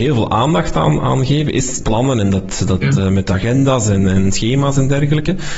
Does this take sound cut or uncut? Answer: cut